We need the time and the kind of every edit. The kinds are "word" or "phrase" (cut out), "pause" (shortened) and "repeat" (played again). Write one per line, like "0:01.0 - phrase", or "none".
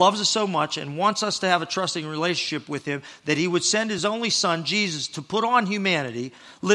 none